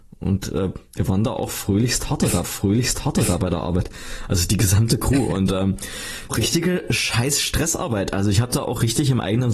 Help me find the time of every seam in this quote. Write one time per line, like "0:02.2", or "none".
0:02.4
0:06.3